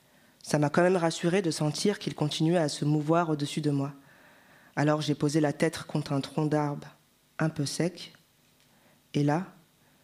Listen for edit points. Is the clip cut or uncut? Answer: uncut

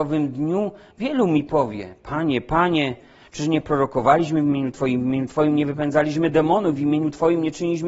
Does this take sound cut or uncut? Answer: uncut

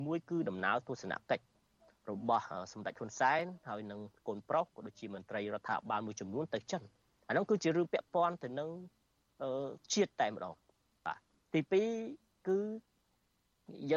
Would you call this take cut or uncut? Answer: cut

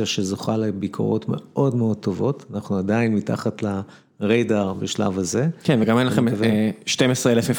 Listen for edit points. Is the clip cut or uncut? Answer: uncut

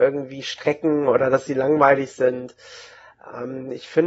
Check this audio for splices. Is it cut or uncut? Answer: uncut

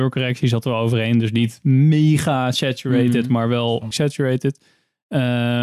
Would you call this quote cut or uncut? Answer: cut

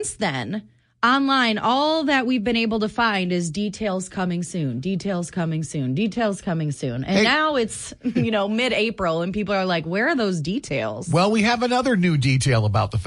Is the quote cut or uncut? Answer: uncut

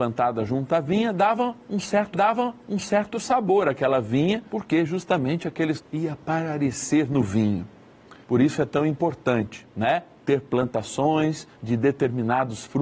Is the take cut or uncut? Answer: cut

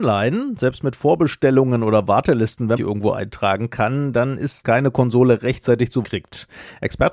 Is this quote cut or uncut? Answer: cut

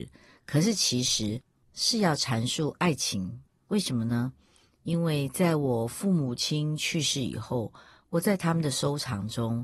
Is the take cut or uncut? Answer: uncut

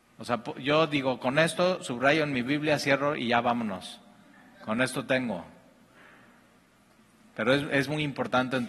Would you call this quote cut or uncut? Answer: uncut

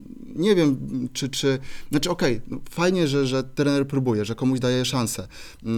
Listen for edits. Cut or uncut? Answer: uncut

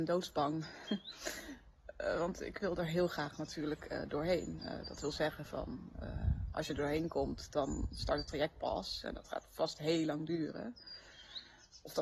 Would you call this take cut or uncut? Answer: uncut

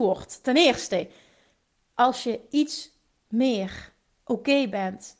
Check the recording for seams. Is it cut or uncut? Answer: uncut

